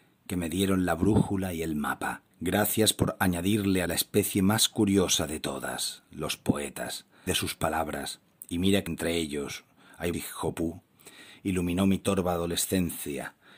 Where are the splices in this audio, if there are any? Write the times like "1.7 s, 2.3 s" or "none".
2.3 s, 3.9 s, 7.3 s, 8.9 s, 10.1 s